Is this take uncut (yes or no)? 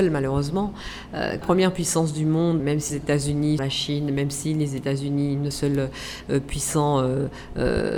no